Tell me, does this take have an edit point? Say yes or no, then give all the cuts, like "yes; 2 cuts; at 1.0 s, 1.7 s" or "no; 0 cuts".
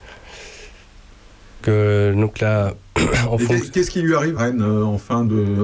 yes; 2 cuts; at 1.6 s, 4.4 s